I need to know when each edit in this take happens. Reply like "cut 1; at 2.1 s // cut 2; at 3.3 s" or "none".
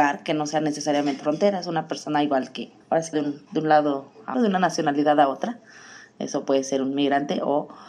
cut 1; at 1.2 s // cut 2; at 2.8 s // cut 3; at 3.1 s // cut 4; at 4.3 s